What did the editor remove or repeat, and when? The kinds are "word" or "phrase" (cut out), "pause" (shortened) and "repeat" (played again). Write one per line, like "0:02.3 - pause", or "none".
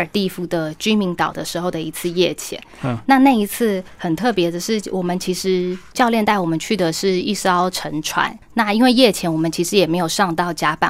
none